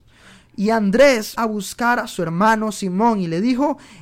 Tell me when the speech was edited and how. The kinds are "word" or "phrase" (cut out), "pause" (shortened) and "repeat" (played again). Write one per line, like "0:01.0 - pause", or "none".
0:01.3 - word

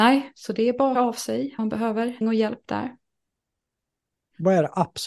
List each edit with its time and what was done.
0:00.9 - word
0:01.6 - word
0:02.2 - word

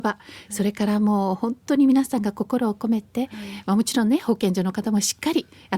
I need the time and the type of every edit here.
none

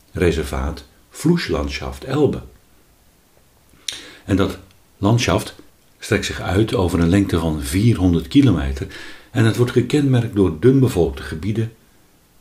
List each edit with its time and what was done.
0:05.7 - pause

